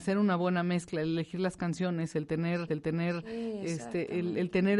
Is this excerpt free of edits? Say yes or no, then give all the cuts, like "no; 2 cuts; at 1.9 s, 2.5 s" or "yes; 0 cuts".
no; 1 cut; at 2.7 s